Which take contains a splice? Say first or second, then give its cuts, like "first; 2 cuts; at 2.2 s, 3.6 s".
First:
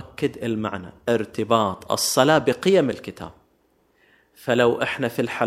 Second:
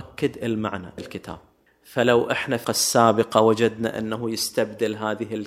second; 3 cuts; at 1.0 s, 1.7 s, 2.6 s